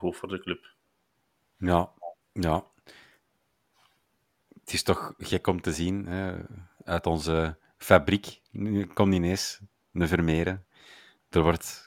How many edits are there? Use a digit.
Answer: 1